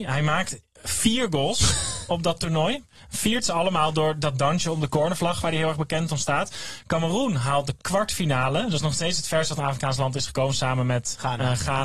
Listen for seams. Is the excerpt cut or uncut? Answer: uncut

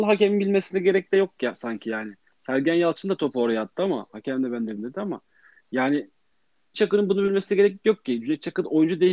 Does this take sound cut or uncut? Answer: cut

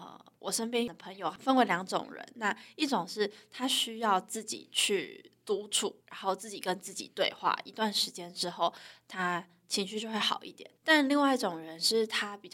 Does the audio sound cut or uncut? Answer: cut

